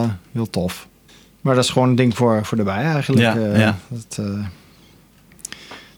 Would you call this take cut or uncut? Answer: cut